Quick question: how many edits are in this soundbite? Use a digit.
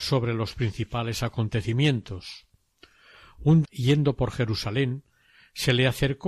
1